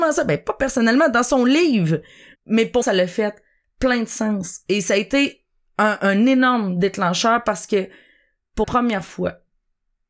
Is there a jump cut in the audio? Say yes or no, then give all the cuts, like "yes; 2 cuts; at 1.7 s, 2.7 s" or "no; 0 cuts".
yes; 4 cuts; at 2.3 s, 2.8 s, 6.0 s, 8.6 s